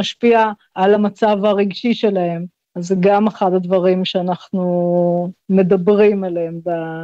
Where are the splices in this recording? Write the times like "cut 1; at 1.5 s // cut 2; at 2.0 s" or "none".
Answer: none